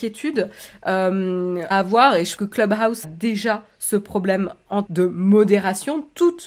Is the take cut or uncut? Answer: cut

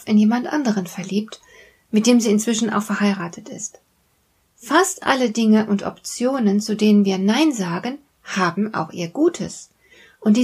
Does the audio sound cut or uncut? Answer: uncut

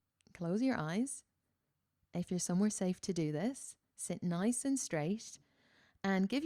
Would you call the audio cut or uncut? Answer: uncut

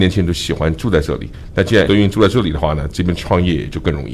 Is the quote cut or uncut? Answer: cut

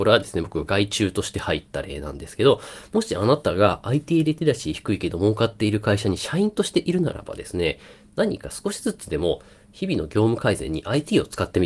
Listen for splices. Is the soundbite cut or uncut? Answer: uncut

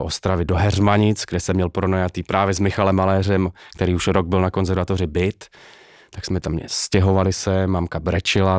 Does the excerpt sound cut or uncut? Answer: uncut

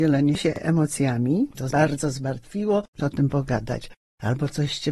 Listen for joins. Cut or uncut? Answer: cut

